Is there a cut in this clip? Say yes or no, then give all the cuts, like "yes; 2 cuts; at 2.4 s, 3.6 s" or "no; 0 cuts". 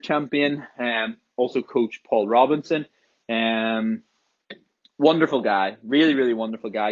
no; 0 cuts